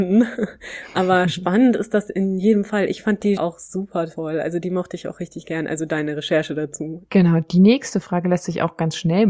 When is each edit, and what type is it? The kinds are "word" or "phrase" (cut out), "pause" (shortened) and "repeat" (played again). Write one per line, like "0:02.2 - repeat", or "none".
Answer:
0:03.4 - word